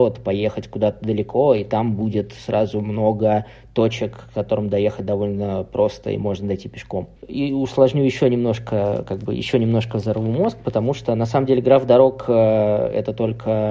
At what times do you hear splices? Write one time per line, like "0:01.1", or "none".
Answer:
0:07.2